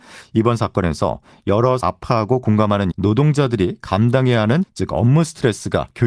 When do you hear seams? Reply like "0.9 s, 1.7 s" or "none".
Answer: 1.8 s, 2.9 s, 4.6 s